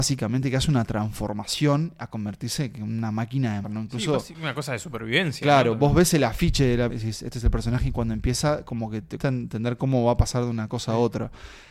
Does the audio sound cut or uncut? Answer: cut